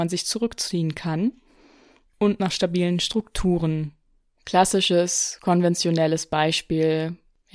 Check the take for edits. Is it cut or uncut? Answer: uncut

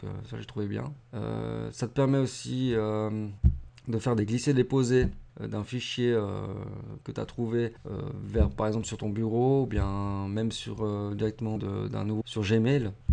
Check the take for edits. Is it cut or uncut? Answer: cut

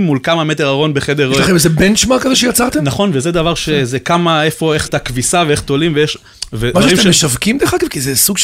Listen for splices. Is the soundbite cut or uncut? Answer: cut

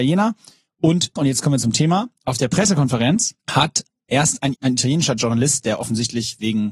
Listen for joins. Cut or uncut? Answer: cut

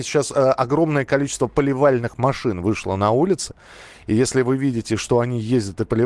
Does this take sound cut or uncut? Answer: uncut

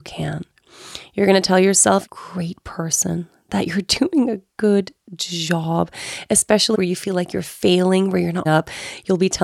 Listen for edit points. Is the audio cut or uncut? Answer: cut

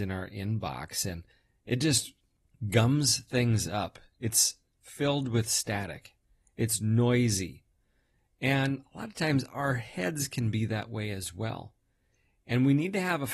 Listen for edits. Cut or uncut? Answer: uncut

